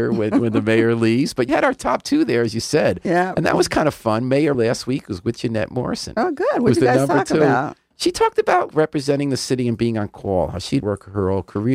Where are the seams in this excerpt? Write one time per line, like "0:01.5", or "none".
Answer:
0:01.5
0:04.5
0:08.7
0:10.8